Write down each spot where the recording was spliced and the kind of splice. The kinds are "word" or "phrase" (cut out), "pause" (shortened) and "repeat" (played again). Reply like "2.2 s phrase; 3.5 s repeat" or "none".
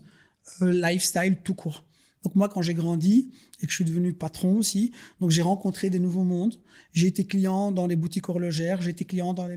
none